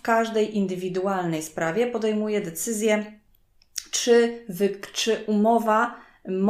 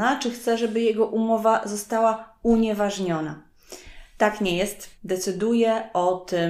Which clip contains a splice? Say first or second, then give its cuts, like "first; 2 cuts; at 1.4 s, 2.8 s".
second; 1 cut; at 4.9 s